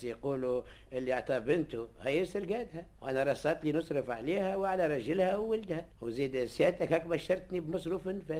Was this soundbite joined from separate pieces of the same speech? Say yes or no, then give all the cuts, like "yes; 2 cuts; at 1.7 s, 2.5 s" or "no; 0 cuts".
yes; 2 cuts; at 2.9 s, 5.9 s